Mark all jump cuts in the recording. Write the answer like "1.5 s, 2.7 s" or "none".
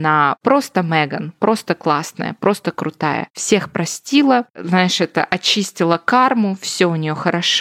none